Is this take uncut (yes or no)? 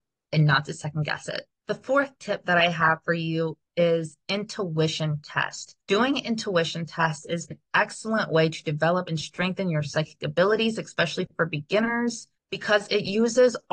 no